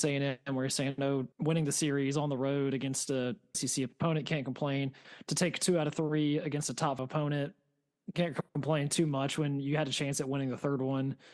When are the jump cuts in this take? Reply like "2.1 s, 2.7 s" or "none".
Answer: 1.3 s, 3.5 s, 7.0 s, 8.5 s